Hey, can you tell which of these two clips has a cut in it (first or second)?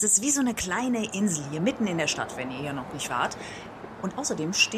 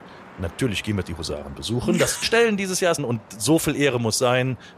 second